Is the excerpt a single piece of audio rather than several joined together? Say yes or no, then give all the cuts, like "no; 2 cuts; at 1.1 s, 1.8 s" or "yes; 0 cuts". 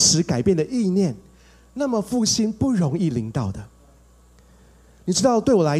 yes; 0 cuts